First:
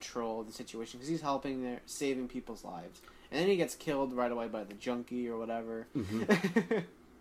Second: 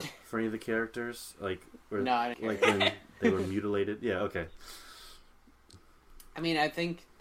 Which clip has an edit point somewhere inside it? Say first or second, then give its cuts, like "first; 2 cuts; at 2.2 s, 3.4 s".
second; 1 cut; at 2.3 s